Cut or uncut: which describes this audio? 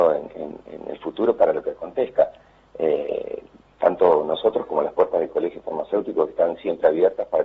uncut